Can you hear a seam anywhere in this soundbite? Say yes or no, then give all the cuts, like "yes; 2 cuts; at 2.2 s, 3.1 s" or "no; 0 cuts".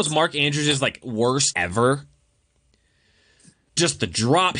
yes; 2 cuts; at 1.0 s, 1.5 s